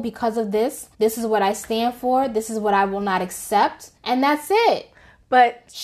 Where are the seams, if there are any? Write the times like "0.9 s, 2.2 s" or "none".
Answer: 0.9 s, 4.0 s